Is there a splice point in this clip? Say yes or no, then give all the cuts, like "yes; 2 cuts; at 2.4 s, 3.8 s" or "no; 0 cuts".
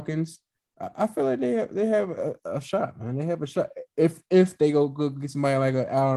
no; 0 cuts